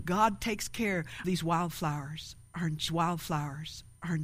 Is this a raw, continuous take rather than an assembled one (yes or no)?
no